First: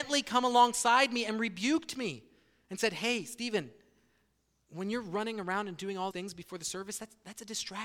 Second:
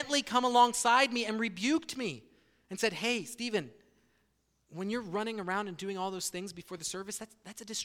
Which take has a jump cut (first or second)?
first